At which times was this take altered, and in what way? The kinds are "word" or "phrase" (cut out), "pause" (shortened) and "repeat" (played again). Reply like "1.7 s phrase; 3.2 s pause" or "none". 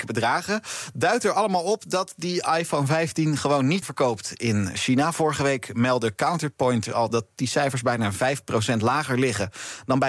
3.8 s word; 6.9 s word

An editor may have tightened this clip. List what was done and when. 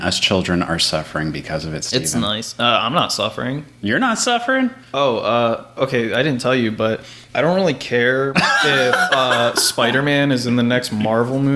7.3 s pause

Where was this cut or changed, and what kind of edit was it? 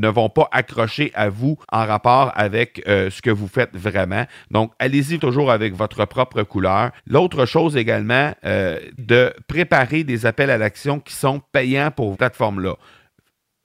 1.6 s pause; 5.2 s word; 7.0 s pause; 9.0 s phrase; 12.1 s phrase

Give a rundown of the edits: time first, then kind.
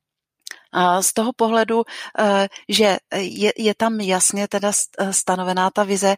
none

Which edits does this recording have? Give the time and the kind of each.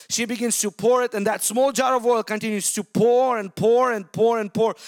none

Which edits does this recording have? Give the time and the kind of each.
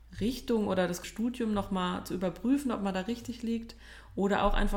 1.0 s word

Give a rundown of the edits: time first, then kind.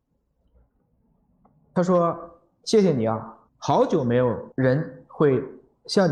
3.5 s pause

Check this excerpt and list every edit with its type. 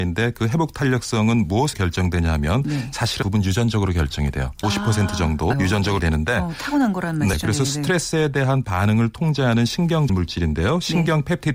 1.7 s word; 3.2 s word; 4.6 s word; 5.5 s word; 6.0 s word; 7.3 s word; 10.1 s word

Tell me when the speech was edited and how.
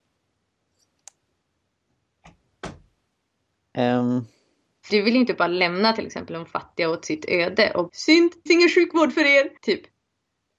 4.9 s word; 7.9 s word; 8.5 s phrase; 9.6 s pause

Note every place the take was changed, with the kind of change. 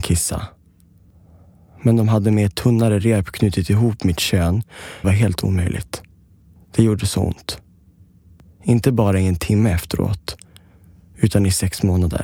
5.0 s phrase

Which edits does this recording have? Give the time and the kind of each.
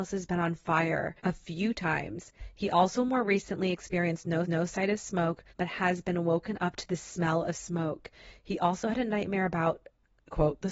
1.2 s pause; 4.5 s repeat; 5.5 s pause

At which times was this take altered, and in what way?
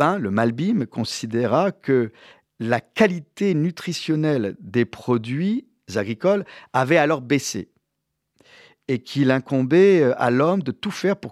none

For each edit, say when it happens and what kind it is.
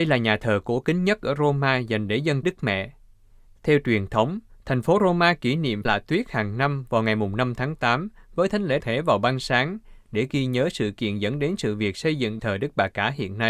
2.4 s word; 5.8 s word; 8.8 s word; 12.4 s word

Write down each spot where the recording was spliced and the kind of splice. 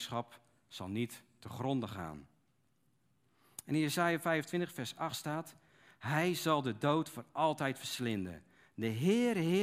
none

